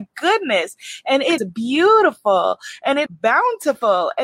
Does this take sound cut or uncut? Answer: cut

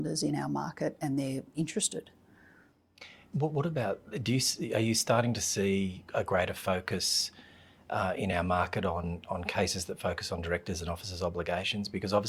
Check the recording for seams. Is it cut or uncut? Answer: uncut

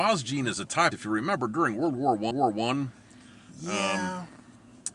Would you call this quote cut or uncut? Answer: cut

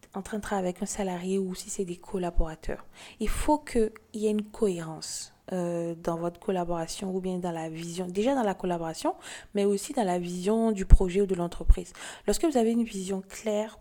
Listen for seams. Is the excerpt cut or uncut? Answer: cut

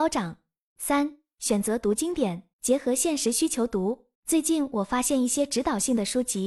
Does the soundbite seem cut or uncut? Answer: cut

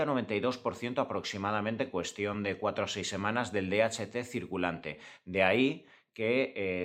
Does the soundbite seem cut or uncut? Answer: uncut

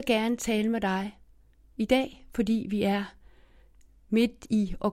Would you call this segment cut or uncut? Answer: uncut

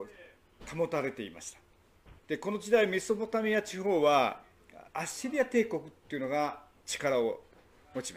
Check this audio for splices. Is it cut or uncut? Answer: cut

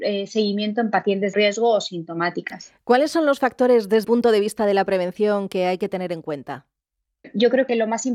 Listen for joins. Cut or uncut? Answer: cut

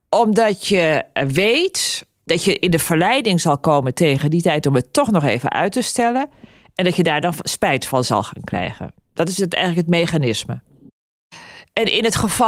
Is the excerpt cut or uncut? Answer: uncut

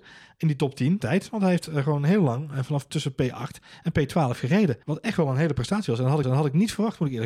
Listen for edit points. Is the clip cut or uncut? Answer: cut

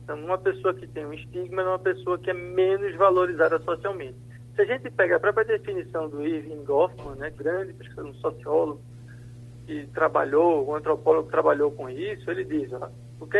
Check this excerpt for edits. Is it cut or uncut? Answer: cut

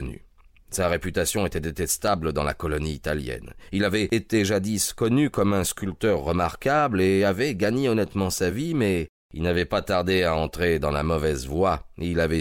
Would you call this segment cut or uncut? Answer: uncut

